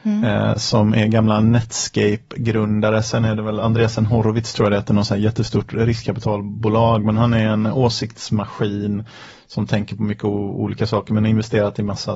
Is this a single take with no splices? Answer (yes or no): yes